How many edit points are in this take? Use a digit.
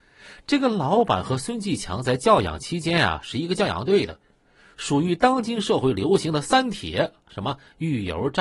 0